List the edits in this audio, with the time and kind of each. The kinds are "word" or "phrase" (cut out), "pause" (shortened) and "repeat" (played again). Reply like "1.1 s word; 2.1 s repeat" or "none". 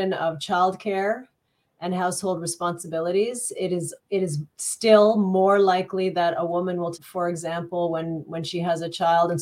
4.0 s pause; 6.9 s phrase